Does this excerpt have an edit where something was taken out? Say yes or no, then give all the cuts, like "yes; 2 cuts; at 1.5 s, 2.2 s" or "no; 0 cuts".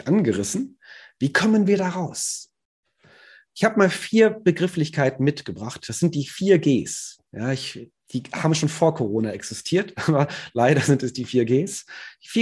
no; 0 cuts